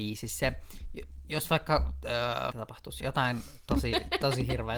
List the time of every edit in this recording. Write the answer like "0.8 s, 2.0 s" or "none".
2.5 s, 3.0 s